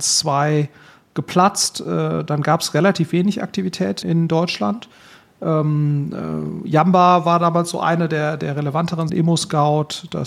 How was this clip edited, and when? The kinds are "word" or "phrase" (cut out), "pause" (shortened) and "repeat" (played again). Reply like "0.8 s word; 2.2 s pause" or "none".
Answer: 4.0 s word; 9.1 s word